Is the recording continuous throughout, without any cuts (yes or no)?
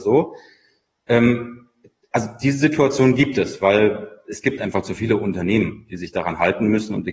yes